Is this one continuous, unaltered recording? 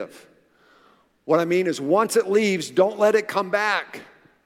yes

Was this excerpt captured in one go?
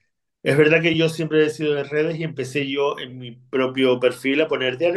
yes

